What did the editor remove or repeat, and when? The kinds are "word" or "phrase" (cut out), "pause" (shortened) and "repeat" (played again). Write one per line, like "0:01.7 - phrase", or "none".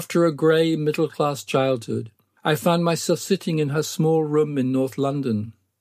none